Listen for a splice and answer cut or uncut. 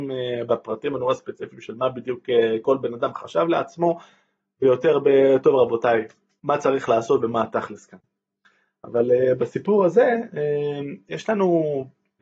uncut